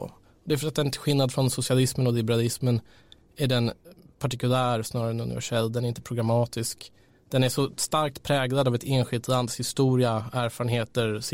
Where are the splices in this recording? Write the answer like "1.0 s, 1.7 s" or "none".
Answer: none